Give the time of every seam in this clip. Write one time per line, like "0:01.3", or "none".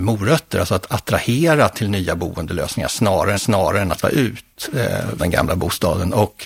0:03.4
0:04.0
0:05.2

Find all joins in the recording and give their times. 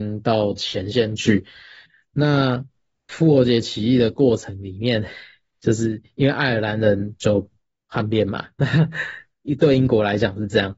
none

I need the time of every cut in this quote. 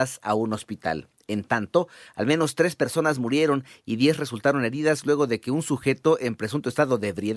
none

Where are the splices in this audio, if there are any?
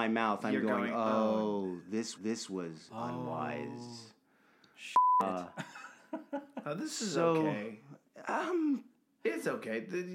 0:02.1

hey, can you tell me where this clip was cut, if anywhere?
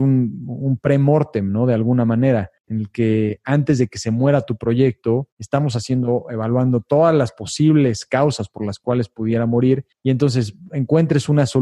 0:02.6
0:05.3
0:09.9

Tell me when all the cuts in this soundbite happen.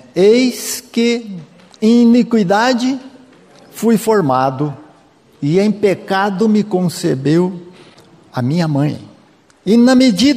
none

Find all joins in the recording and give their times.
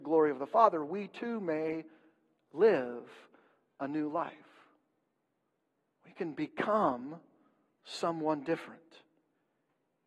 none

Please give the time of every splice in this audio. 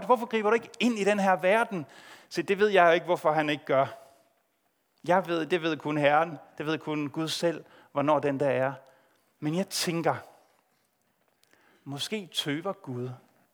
none

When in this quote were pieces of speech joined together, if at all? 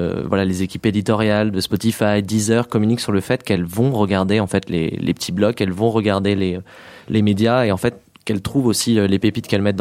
none

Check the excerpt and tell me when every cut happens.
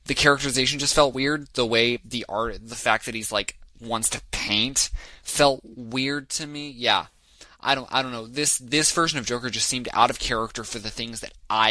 none

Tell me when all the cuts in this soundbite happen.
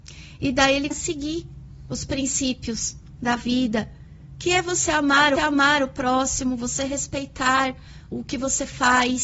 0:00.9
0:03.2
0:05.4
0:08.1

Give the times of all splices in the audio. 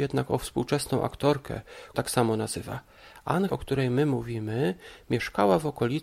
0:01.9
0:03.5

